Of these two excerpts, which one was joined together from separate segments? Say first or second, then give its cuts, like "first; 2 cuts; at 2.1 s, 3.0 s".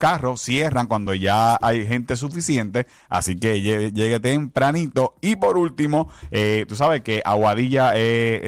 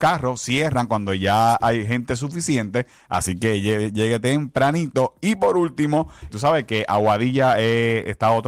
second; 1 cut; at 6.3 s